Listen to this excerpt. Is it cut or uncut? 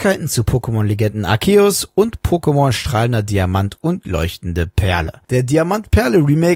uncut